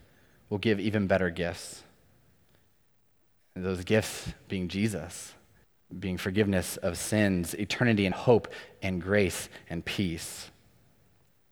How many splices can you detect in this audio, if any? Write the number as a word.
two